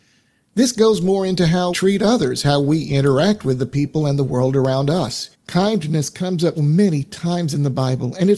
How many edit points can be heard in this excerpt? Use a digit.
3